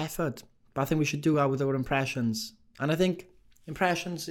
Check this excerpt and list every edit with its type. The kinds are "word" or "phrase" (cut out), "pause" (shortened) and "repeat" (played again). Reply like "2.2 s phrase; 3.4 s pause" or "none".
none